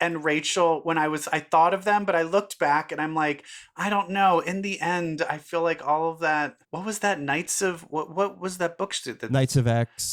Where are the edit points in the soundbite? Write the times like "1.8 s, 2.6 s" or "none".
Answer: 6.6 s